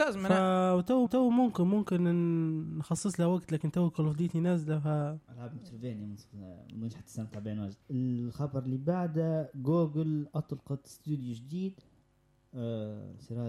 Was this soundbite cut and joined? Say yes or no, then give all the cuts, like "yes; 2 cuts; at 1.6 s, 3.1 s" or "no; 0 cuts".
yes; 3 cuts; at 1.1 s, 5.2 s, 7.8 s